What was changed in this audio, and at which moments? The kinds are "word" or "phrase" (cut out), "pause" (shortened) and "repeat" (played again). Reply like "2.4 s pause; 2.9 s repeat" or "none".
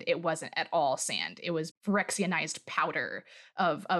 1.7 s word